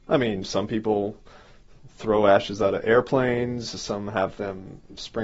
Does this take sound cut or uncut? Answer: uncut